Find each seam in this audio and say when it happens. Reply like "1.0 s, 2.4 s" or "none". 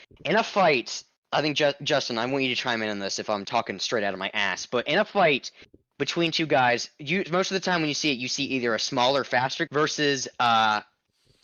3.4 s, 9.7 s